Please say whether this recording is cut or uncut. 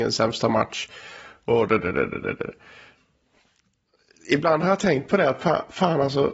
uncut